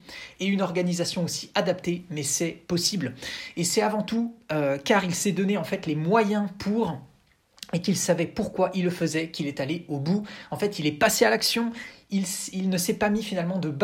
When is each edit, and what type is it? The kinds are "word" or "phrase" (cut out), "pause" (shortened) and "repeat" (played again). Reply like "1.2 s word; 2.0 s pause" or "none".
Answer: none